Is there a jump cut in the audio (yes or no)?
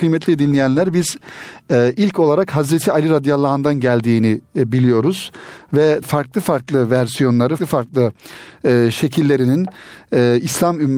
yes